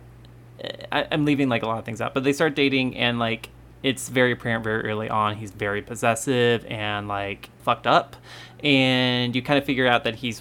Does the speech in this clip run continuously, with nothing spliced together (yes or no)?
no